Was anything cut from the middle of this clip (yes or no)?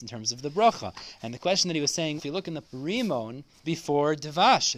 yes